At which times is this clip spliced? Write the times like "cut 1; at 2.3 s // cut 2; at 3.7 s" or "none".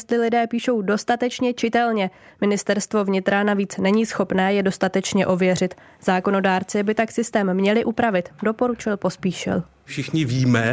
none